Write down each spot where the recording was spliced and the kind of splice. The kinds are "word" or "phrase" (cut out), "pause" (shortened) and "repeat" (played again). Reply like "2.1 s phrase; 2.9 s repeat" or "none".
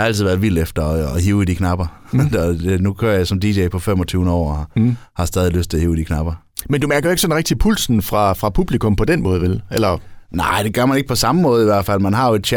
none